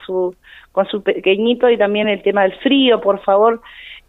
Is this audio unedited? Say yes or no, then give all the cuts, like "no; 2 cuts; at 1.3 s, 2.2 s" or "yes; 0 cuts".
yes; 0 cuts